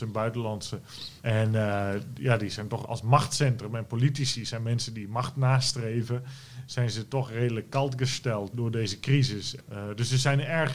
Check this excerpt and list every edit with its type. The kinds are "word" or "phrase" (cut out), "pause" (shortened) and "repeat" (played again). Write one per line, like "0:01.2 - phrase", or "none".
0:01.2 - pause
0:02.8 - word
0:08.5 - word